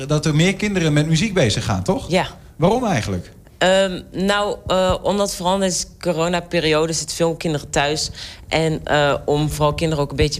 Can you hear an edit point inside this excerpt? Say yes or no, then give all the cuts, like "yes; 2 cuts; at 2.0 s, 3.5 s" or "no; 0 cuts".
no; 0 cuts